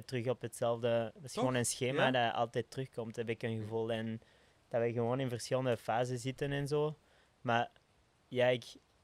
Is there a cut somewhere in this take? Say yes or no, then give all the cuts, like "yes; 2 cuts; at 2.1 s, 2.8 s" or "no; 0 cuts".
no; 0 cuts